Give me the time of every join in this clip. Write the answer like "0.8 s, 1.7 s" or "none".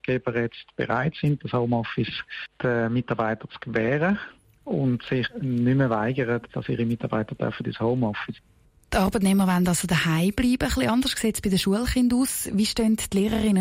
none